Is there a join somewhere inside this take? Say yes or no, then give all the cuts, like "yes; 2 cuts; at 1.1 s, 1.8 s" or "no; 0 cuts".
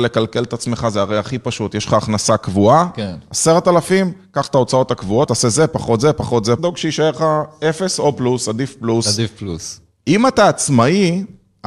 yes; 2 cuts; at 5.3 s, 6.6 s